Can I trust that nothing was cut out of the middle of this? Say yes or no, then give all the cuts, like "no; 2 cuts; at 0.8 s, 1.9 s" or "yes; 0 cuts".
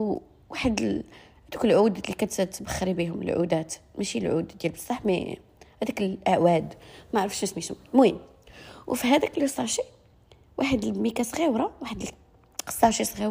yes; 0 cuts